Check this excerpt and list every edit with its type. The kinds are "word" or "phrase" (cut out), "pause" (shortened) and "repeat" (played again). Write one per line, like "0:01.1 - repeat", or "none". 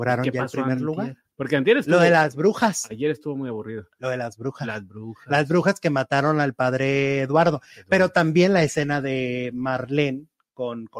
0:01.3 - pause